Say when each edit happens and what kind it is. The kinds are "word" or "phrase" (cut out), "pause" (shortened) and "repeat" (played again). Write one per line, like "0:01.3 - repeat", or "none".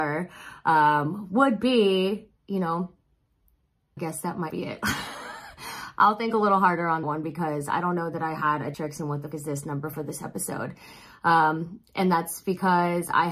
0:04.0 - word
0:04.5 - word
0:07.0 - word
0:08.7 - word
0:09.3 - word
0:09.9 - word